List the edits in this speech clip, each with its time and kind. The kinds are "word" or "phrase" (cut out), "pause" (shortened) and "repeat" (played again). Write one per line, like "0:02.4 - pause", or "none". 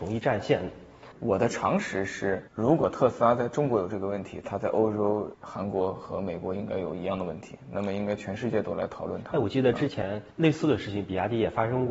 0:02.5 - pause
0:05.3 - pause
0:10.3 - pause